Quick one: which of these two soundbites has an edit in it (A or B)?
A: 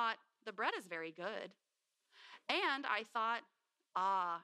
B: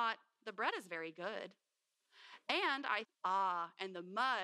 B